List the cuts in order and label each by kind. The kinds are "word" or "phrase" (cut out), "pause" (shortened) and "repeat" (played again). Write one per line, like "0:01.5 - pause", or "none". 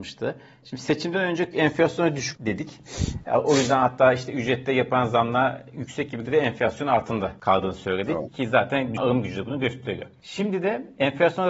0:01.5 - word
0:02.3 - word
0:06.2 - word
0:09.0 - word